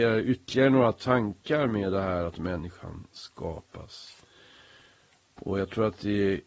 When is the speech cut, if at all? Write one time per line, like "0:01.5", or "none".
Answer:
none